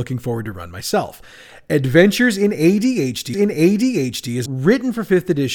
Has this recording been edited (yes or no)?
yes